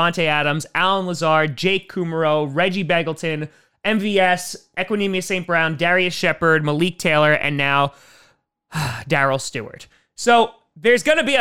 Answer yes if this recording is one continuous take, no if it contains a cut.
yes